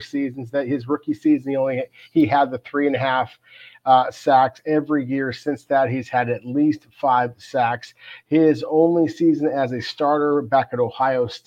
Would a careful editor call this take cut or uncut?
uncut